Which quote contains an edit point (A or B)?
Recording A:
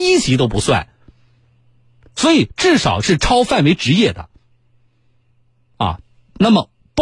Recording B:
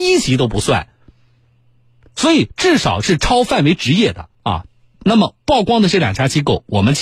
B